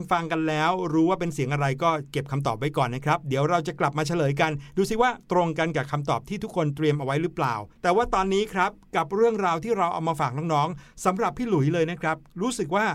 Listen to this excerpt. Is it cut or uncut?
cut